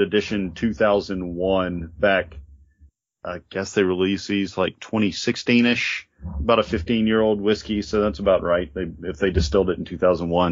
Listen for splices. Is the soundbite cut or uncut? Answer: uncut